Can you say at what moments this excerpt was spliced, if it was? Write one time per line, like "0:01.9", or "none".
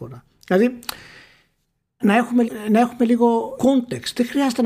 0:02.0
0:02.4
0:03.6